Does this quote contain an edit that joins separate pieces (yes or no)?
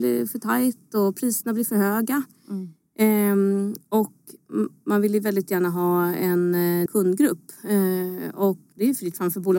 yes